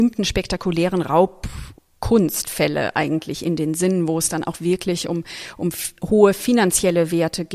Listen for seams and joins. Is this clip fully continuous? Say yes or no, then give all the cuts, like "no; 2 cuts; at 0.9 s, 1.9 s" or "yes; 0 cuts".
yes; 0 cuts